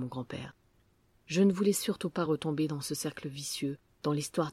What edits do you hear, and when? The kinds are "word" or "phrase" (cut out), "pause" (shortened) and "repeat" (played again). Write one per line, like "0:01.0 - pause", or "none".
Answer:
none